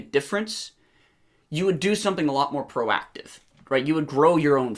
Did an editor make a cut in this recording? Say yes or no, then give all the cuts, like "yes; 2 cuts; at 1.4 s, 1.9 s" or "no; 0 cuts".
no; 0 cuts